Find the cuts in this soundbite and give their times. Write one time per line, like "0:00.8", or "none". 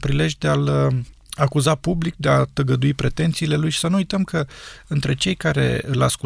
none